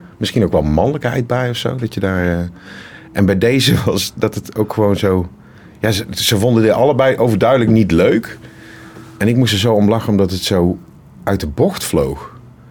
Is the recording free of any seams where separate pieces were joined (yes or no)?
yes